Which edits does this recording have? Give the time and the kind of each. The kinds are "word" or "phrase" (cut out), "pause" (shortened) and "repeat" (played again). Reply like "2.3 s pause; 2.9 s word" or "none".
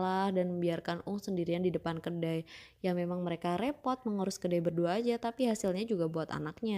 none

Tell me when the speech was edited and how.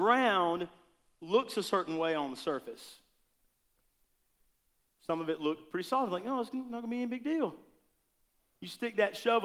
none

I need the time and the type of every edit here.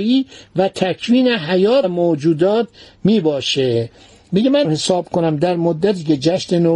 4.6 s word

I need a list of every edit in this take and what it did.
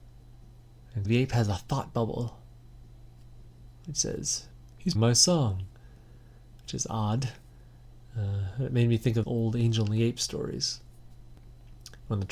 1.0 s word; 4.9 s word; 9.2 s word

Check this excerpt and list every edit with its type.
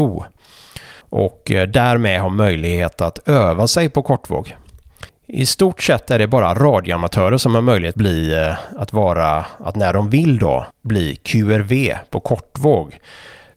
1.0 s pause; 5.1 s pause; 7.9 s word; 10.7 s pause

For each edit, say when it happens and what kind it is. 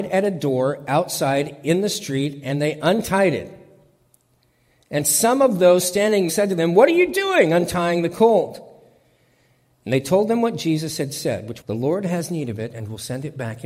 6.3 s word; 11.6 s word

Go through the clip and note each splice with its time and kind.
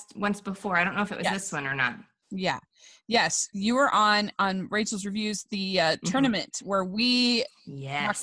none

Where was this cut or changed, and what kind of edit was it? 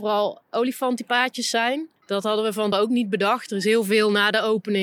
2.0 s pause; 2.7 s word

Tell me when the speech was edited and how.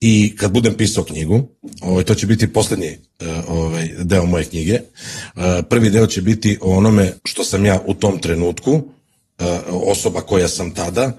7.2 s pause

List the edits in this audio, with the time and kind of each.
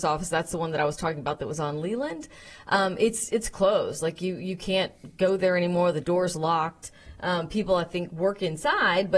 none

